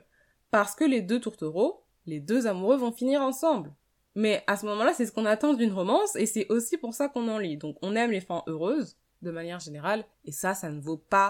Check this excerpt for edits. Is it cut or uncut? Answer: cut